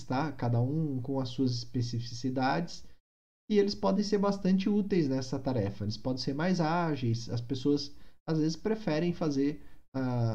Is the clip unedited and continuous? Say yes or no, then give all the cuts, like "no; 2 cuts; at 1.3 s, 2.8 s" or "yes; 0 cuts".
yes; 0 cuts